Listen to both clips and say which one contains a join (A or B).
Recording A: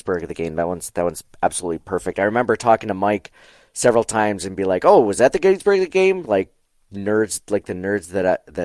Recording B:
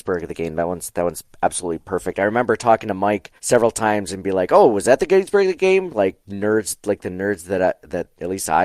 B